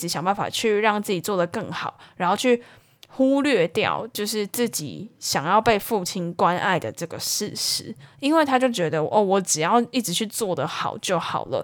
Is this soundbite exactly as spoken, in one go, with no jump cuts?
yes; 0 cuts

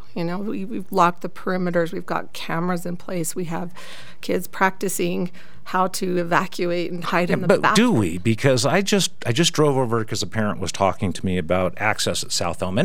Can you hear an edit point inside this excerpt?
no; 0 cuts

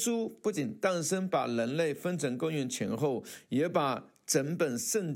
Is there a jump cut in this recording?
no; 0 cuts

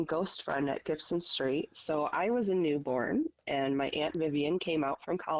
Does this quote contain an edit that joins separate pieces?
no; 0 cuts

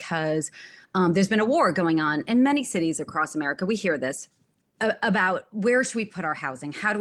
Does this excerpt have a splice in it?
no; 0 cuts

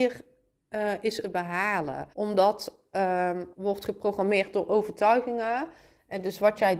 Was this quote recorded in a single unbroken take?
no; 3 cuts; at 1.2 s, 2.1 s, 3.5 s

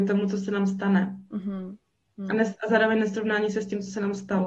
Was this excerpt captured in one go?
yes; 0 cuts

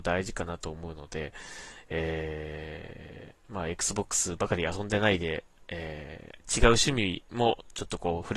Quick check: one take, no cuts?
no; 1 cut; at 6.4 s

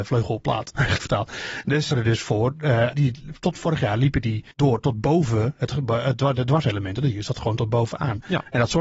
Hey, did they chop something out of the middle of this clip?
yes; 4 cuts; at 1.0 s, 1.9 s, 2.9 s, 4.5 s

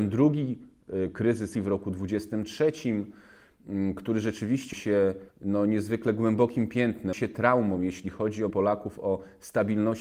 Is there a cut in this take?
yes; 5 cuts; at 1.5 s, 4.7 s, 5.3 s, 7.1 s, 8.5 s

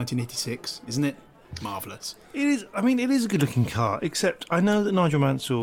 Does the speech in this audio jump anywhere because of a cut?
no; 0 cuts

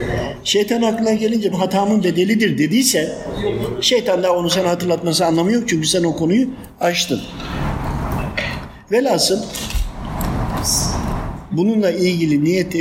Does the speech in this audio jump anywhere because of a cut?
yes; 1 cut; at 1.5 s

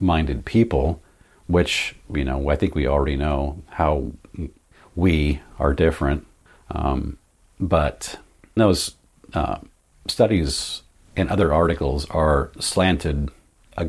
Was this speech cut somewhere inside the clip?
yes; 1 cut; at 8.6 s

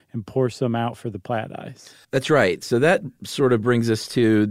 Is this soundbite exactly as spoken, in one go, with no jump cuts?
no; 1 cut; at 2.0 s

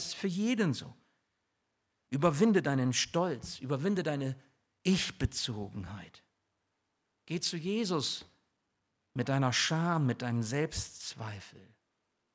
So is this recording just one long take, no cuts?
yes; 0 cuts

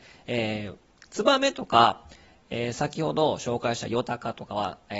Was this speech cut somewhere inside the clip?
no; 0 cuts

